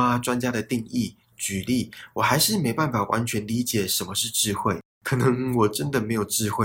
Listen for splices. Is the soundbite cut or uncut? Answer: uncut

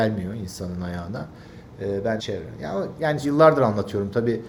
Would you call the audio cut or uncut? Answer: cut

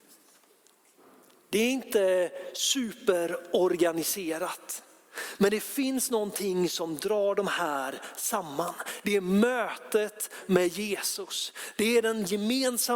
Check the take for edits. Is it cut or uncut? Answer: uncut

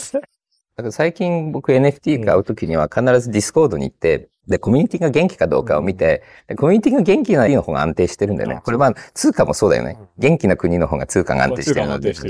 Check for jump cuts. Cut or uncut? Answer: cut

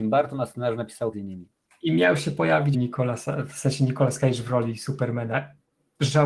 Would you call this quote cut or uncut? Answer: cut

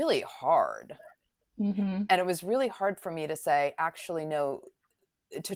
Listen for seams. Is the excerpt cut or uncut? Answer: uncut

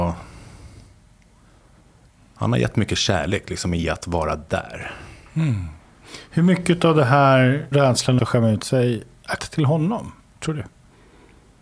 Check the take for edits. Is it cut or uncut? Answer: cut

